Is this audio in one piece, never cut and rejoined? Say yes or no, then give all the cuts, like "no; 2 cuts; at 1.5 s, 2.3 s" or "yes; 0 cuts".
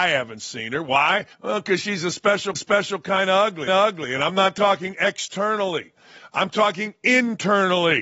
no; 3 cuts; at 1.3 s, 2.5 s, 3.7 s